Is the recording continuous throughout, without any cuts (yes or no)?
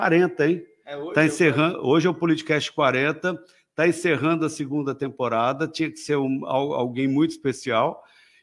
yes